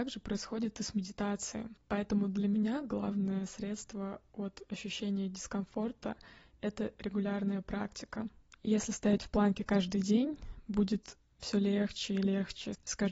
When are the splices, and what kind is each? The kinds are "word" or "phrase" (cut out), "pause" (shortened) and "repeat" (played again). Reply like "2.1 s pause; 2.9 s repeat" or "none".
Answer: none